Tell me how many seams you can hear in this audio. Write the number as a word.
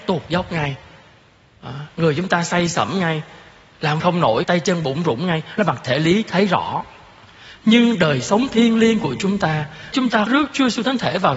five